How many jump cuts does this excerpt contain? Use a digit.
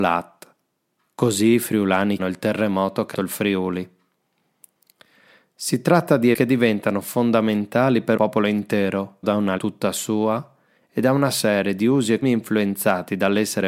7